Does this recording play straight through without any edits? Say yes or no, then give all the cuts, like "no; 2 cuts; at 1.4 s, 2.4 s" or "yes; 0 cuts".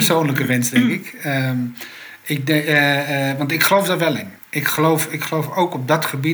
no; 1 cut; at 4.4 s